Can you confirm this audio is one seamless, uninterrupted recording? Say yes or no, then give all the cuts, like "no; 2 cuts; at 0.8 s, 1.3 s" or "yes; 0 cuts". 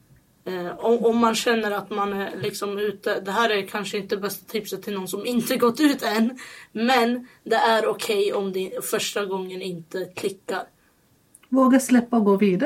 yes; 0 cuts